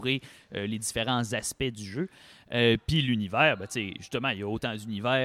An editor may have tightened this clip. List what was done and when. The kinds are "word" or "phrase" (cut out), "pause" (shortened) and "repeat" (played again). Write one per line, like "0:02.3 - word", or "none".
none